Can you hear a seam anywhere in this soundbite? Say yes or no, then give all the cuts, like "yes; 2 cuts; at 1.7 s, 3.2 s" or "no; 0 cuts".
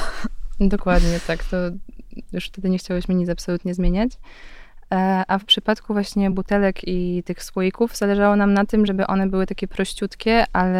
no; 0 cuts